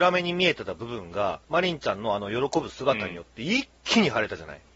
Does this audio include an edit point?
yes; 1 cut; at 1.4 s

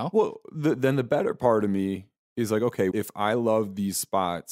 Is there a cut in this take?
yes; 1 cut; at 2.9 s

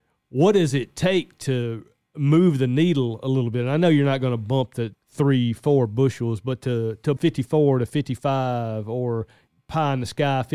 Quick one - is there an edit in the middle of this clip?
yes; 2 cuts; at 4.9 s, 7.2 s

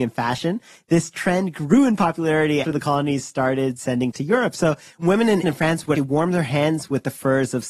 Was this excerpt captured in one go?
no; 4 cuts; at 2.6 s, 4.1 s, 5.4 s, 6.0 s

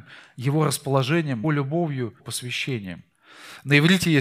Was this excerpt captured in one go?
no; 2 cuts; at 1.4 s, 2.2 s

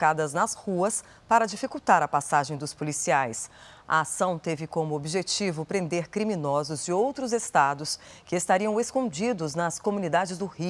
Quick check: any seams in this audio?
no; 0 cuts

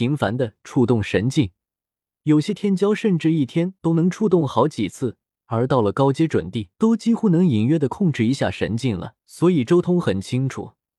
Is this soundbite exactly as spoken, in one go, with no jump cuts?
no; 2 cuts; at 6.7 s, 9.2 s

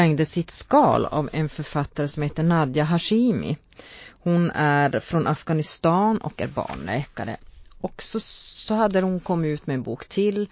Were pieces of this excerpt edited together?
no; 0 cuts

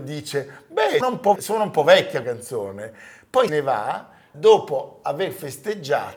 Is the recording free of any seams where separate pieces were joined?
no; 5 cuts; at 1.0 s, 1.4 s, 2.2 s, 3.5 s, 4.3 s

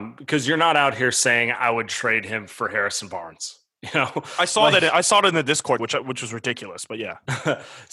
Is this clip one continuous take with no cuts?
no; 1 cut; at 5.8 s

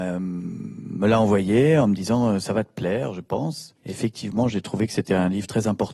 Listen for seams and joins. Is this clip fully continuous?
no; 1 cut; at 3.8 s

